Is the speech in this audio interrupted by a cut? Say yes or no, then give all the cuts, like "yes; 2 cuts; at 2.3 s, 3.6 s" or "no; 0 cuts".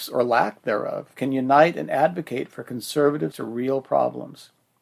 yes; 1 cut; at 3.3 s